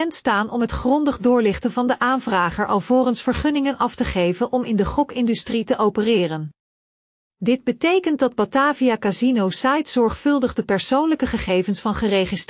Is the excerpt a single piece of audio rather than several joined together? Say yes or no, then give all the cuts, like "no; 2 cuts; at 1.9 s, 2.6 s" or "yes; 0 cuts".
yes; 0 cuts